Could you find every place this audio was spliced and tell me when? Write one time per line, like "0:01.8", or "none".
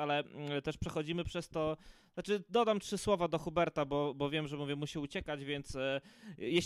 none